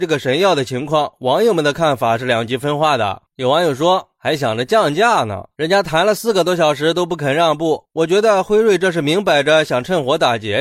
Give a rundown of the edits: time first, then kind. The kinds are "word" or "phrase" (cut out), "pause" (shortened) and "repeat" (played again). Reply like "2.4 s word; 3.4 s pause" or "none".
5.5 s phrase